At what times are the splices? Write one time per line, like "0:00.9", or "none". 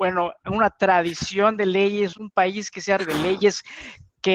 0:02.1
0:03.0